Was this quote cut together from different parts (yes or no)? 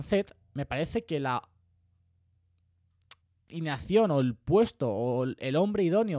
yes